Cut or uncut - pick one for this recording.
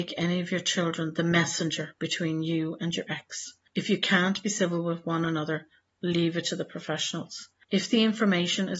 uncut